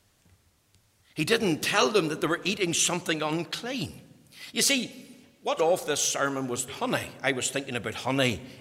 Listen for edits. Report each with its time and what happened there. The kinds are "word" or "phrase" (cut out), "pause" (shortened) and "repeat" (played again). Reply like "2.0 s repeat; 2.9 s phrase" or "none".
5.6 s word; 6.7 s word